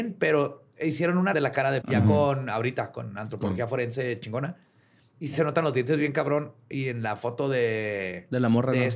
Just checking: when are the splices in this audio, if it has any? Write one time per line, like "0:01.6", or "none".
0:01.3
0:01.8
0:05.3